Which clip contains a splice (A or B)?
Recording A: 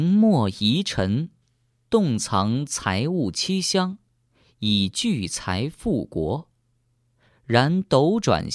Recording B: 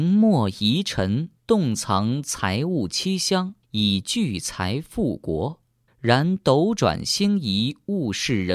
B